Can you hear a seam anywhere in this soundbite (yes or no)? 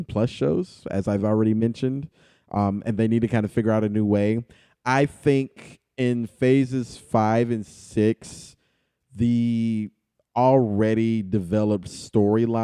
no